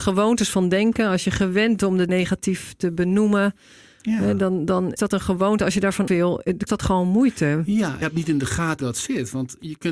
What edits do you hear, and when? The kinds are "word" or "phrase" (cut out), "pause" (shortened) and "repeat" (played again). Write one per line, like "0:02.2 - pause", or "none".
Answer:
0:01.8 - word
0:02.1 - word
0:05.0 - word
0:06.1 - word
0:06.7 - word
0:08.0 - word
0:08.8 - word